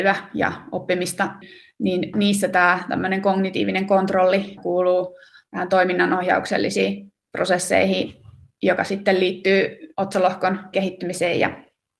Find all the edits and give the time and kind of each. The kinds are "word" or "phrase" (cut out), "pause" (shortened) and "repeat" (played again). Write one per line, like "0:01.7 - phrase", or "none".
0:04.6 - word
0:09.9 - word
0:10.7 - word